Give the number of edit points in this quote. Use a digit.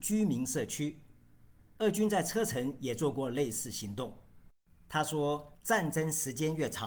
0